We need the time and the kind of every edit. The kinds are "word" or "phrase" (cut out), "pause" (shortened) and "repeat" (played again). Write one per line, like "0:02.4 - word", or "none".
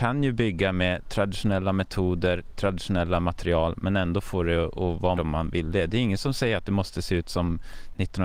0:02.5 - word
0:05.2 - word